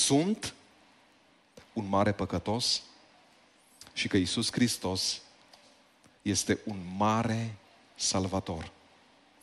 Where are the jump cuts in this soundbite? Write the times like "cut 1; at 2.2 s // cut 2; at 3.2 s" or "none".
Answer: none